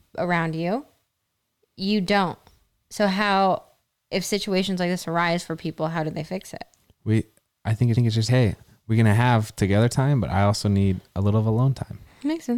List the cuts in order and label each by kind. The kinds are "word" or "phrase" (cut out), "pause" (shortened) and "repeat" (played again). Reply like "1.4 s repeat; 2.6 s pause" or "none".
7.9 s repeat; 8.3 s word